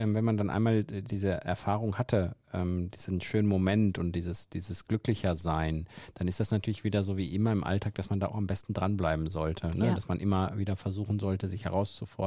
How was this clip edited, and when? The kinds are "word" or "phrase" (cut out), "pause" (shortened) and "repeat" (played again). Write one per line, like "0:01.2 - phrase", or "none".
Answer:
none